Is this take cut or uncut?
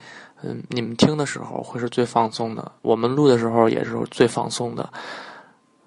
cut